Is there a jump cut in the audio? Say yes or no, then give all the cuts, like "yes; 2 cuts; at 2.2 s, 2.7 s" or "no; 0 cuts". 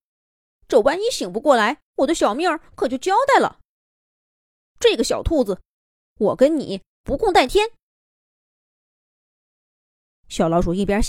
yes; 1 cut; at 1.9 s